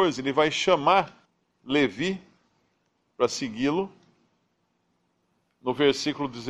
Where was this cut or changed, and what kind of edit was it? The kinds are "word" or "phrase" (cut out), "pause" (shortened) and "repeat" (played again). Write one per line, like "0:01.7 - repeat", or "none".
0:01.3 - pause